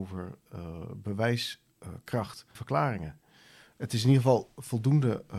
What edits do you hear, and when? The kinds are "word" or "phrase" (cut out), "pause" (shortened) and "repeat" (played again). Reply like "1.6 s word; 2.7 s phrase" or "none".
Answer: 2.6 s word